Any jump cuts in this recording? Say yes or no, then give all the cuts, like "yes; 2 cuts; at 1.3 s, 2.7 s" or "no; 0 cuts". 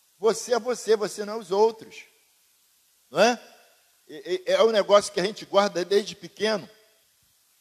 no; 0 cuts